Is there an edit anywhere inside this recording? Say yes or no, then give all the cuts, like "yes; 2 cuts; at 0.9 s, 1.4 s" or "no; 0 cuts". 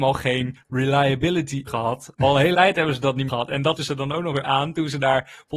yes; 5 cuts; at 1.7 s, 2.5 s, 3.3 s, 3.8 s, 4.4 s